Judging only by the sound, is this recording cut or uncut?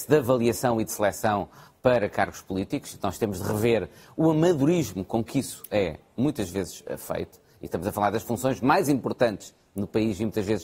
uncut